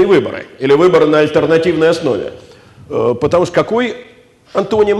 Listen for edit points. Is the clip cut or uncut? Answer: uncut